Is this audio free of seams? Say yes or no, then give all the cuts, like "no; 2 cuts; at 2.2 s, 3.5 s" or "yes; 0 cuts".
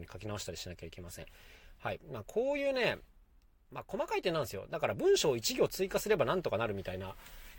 yes; 0 cuts